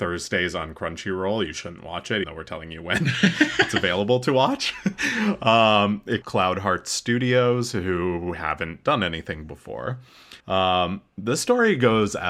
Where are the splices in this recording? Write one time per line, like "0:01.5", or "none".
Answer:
0:02.2
0:06.2
0:10.4